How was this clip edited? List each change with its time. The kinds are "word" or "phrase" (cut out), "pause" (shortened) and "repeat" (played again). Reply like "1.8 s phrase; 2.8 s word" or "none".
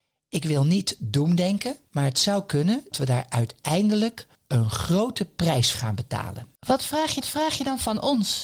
1.8 s pause; 2.9 s word; 4.3 s pause; 5.7 s word; 6.5 s pause; 7.2 s repeat